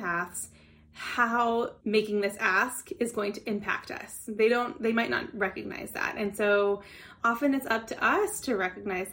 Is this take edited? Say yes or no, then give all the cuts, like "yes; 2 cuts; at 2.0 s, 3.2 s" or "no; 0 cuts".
yes; 1 cut; at 1.8 s